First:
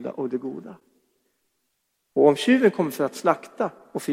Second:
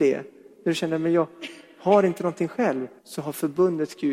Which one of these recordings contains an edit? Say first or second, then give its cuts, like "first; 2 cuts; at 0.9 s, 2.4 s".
second; 1 cut; at 3.0 s